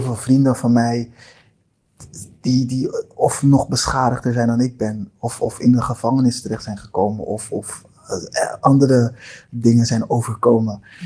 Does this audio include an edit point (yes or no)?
no